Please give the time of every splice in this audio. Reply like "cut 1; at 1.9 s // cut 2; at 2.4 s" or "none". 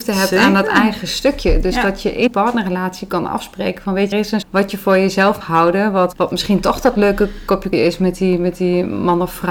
cut 1; at 2.3 s // cut 2; at 4.1 s // cut 3; at 4.4 s // cut 4; at 5.4 s // cut 5; at 6.1 s // cut 6; at 7.7 s